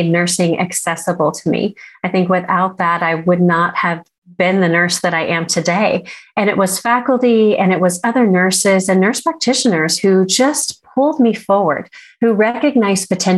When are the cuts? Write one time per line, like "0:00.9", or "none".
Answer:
none